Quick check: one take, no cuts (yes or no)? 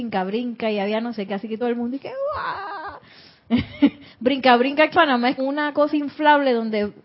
no